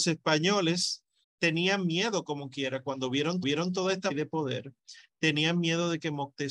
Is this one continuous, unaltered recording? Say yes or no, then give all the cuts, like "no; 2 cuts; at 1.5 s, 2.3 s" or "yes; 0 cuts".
no; 3 cuts; at 1.2 s, 3.4 s, 4.1 s